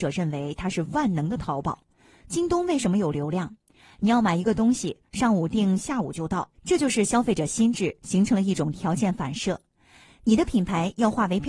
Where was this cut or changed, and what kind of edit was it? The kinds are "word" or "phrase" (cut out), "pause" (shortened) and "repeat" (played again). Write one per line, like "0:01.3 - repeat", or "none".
0:06.5 - pause